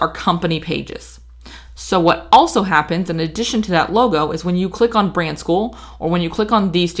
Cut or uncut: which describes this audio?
uncut